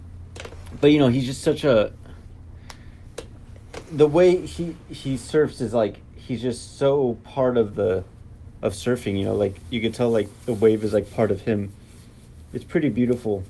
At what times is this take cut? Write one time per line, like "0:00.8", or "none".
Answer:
none